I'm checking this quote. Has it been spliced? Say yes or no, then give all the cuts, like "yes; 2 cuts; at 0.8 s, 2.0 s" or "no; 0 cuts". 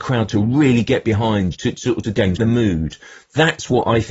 yes; 3 cuts; at 1.5 s, 2.0 s, 2.4 s